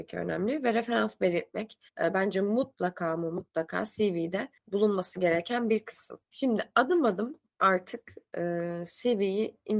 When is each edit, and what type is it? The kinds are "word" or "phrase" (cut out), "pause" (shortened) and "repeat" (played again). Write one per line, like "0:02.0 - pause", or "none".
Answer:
0:01.9 - pause
0:04.6 - pause
0:06.2 - pause
0:07.5 - pause

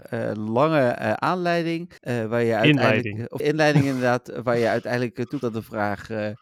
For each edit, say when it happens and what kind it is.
0:02.0 - pause
0:03.4 - word
0:05.4 - word

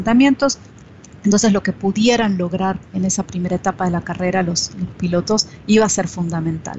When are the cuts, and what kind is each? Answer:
0:02.8 - pause

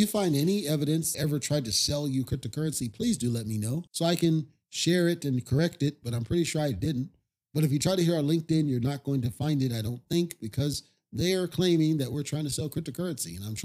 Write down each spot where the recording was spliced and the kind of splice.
0:01.1 - phrase
0:03.9 - pause

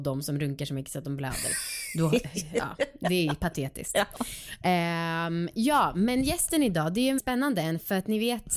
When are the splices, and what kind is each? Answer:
0:07.2 - word

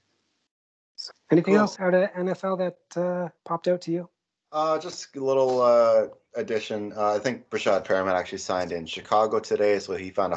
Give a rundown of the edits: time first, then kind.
0:01.1 - word
0:01.8 - word
0:03.4 - pause

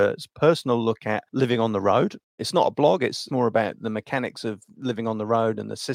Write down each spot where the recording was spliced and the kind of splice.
0:01.3 - pause
0:02.3 - pause
0:03.3 - word

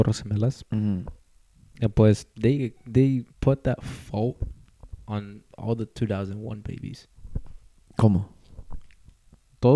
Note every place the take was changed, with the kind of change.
0:02.3 - pause
0:03.3 - pause
0:05.5 - pause

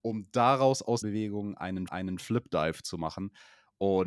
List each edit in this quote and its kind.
0:01.0 - word
0:01.9 - repeat

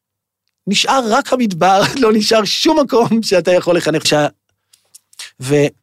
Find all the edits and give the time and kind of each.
0:04.0 - phrase

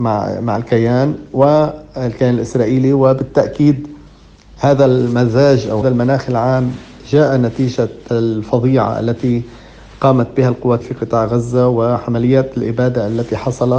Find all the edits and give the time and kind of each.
0:05.8 - word
0:08.1 - word
0:10.8 - word

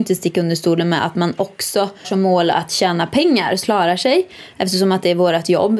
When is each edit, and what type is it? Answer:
0:02.0 - word
0:03.6 - phrase

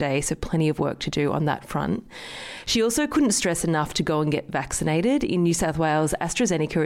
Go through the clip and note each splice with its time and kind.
none

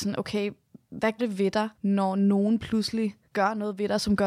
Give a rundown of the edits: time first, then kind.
0:01.2 - word
0:01.7 - pause
0:03.2 - pause

